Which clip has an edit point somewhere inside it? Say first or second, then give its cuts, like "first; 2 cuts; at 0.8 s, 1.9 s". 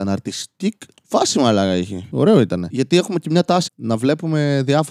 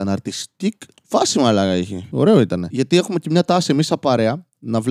first; 1 cut; at 3.7 s